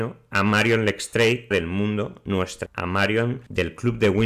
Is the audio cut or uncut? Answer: cut